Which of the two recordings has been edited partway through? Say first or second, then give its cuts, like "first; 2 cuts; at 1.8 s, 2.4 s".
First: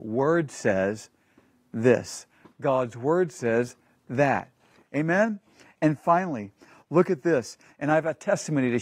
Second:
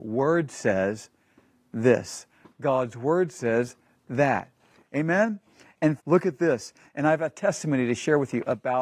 second; 1 cut; at 6.0 s